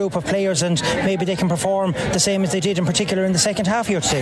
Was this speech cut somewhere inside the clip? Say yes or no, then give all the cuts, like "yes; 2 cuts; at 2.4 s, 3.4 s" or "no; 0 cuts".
no; 0 cuts